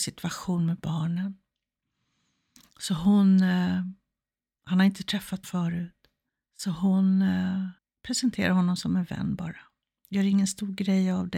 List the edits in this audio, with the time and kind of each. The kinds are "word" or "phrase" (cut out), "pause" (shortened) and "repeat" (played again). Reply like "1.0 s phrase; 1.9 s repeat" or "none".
5.4 s word; 6.3 s pause; 7.8 s pause

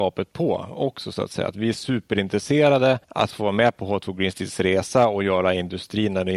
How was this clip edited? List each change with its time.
3.0 s pause

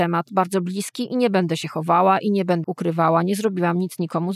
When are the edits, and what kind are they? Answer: 2.6 s word

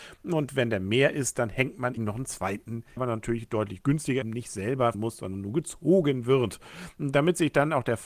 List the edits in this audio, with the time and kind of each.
2.0 s word; 3.0 s phrase; 4.2 s phrase; 4.9 s word

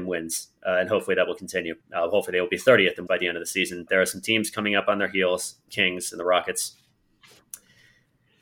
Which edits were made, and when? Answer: 1.8 s pause; 3.1 s word; 3.9 s word; 5.7 s phrase

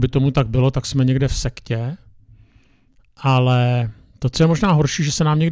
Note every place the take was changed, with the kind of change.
none

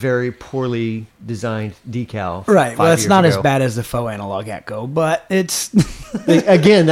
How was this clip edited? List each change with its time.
none

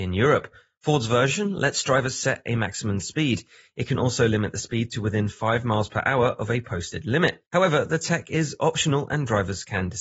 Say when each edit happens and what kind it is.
7.5 s pause

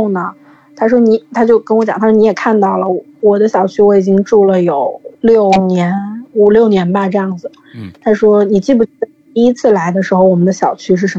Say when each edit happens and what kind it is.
5.1 s pause

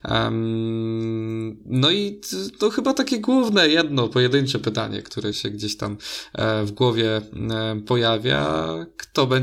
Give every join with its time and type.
5.3 s word

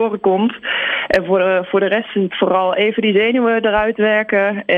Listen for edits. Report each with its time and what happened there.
none

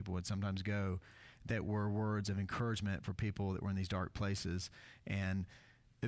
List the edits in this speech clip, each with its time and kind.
none

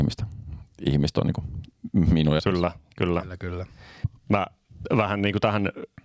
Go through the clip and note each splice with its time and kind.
2.4 s phrase

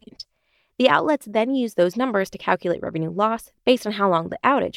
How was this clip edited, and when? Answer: none

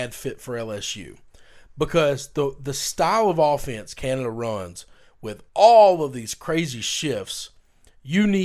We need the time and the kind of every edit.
5.5 s pause

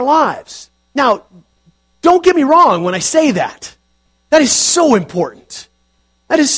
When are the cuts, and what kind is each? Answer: none

